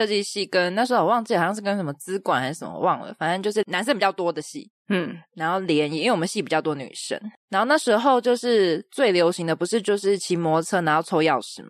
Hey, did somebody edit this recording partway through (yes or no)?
no